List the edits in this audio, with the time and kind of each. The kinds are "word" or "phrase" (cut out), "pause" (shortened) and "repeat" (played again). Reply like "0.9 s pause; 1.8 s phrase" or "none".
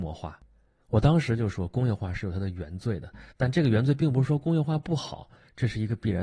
3.3 s pause